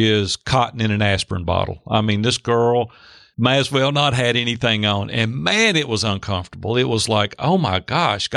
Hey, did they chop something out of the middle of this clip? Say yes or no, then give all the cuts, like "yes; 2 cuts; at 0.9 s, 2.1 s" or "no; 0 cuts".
no; 0 cuts